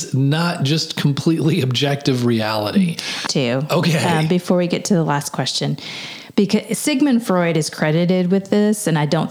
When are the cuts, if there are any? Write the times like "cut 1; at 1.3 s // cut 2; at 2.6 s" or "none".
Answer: cut 1; at 3.3 s